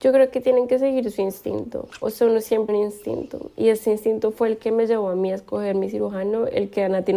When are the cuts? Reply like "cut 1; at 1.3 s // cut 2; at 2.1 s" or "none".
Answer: cut 1; at 2.7 s

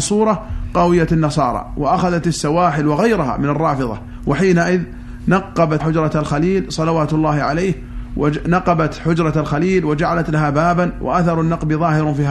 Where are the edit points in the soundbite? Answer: cut 1; at 5.8 s

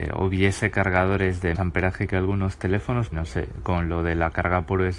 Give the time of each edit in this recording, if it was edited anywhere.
cut 1; at 1.5 s // cut 2; at 3.1 s

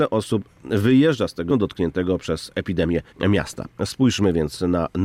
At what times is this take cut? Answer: cut 1; at 1.5 s // cut 2; at 3.1 s

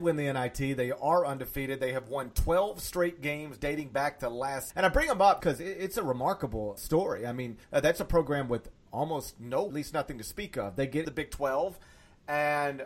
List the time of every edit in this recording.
cut 1; at 4.7 s // cut 2; at 5.4 s // cut 3; at 6.8 s // cut 4; at 7.6 s // cut 5; at 9.7 s // cut 6; at 11.0 s

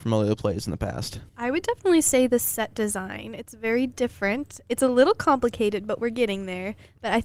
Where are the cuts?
cut 1; at 1.3 s

